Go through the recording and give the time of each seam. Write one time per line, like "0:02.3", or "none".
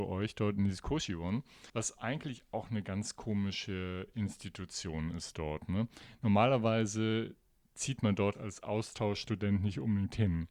0:01.7
0:08.3